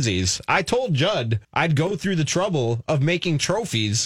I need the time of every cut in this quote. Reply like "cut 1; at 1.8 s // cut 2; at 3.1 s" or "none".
cut 1; at 1.4 s